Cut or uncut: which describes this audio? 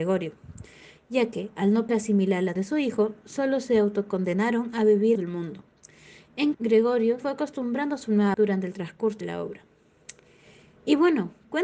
cut